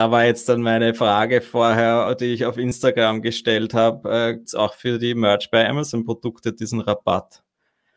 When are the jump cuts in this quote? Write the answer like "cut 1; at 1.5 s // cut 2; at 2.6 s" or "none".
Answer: cut 1; at 4.4 s

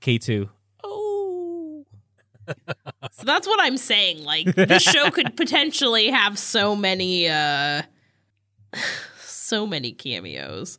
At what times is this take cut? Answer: none

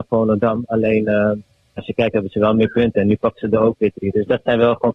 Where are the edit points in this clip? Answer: cut 1; at 1.8 s

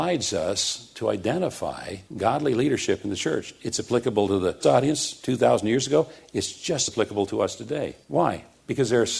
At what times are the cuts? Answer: cut 1; at 2.1 s // cut 2; at 4.6 s // cut 3; at 6.9 s // cut 4; at 8.0 s

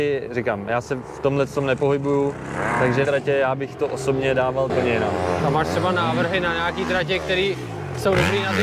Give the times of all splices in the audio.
cut 1; at 3.0 s // cut 2; at 4.7 s

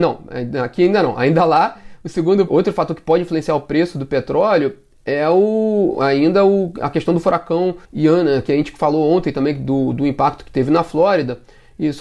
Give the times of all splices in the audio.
cut 1; at 2.5 s // cut 2; at 7.8 s

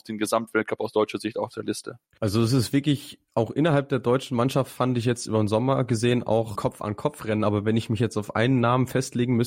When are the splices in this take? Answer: cut 1; at 2.1 s // cut 2; at 6.6 s

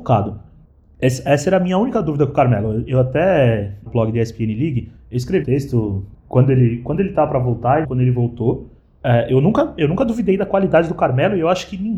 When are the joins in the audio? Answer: cut 1; at 3.9 s // cut 2; at 5.4 s // cut 3; at 7.8 s

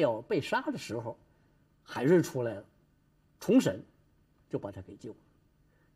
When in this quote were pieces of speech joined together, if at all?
none

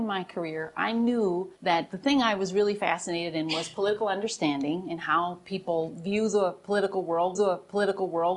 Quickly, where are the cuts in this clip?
cut 1; at 1.6 s // cut 2; at 7.3 s

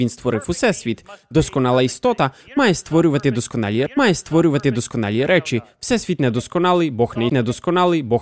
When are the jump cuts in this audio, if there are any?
cut 1; at 3.9 s // cut 2; at 7.3 s

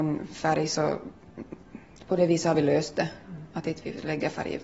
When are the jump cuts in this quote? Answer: none

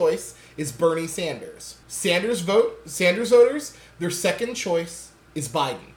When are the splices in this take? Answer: cut 1; at 1.8 s

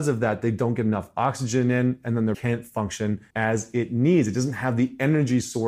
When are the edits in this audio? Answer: cut 1; at 2.3 s // cut 2; at 3.3 s

